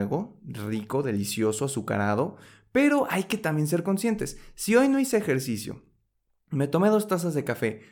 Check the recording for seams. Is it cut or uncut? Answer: uncut